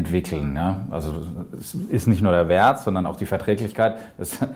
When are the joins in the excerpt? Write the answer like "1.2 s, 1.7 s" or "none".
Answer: none